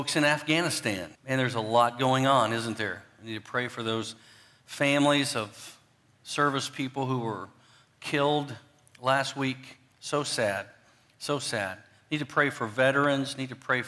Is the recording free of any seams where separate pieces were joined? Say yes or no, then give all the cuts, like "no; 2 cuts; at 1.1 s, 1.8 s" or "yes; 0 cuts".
no; 1 cut; at 1.1 s